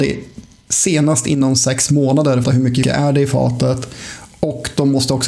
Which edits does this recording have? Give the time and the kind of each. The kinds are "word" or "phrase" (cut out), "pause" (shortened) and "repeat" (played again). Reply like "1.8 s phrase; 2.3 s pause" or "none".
2.4 s phrase; 2.8 s word